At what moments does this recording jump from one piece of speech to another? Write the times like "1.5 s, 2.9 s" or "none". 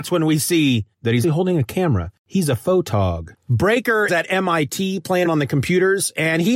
0.9 s, 1.2 s, 4.1 s, 5.3 s